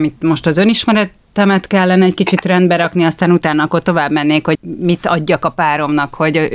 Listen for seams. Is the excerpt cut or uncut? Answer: cut